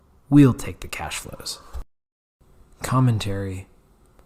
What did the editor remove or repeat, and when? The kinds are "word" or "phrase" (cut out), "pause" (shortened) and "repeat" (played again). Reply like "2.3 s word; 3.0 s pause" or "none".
2.1 s pause